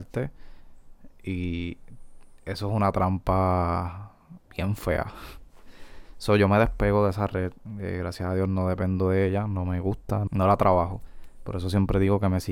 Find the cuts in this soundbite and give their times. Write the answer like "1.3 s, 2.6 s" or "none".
4.4 s, 10.3 s